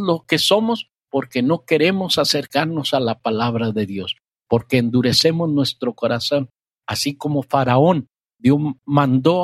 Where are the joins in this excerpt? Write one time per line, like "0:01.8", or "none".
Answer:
none